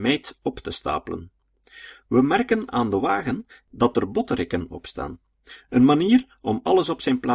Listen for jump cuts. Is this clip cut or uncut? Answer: uncut